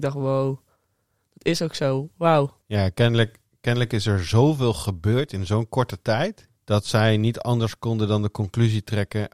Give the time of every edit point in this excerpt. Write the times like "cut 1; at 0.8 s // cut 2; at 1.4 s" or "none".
cut 1; at 2.6 s // cut 2; at 6.6 s